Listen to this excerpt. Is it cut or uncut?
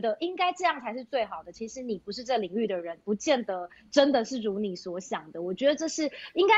uncut